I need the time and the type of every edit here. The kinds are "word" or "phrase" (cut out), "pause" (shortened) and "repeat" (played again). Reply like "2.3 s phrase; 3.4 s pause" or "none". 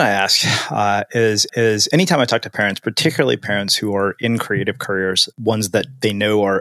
1.5 s repeat; 5.3 s word